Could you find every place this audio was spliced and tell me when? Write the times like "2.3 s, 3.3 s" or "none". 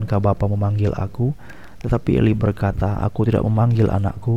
none